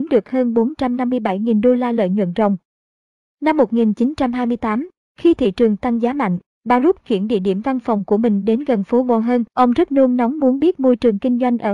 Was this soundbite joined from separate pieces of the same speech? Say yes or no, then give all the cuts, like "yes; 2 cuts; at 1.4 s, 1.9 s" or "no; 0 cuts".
yes; 1 cut; at 9.5 s